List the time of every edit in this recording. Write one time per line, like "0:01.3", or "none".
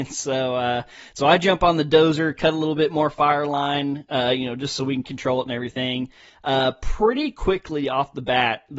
none